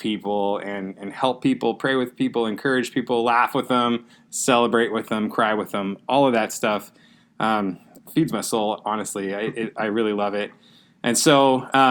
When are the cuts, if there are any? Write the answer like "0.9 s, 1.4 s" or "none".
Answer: none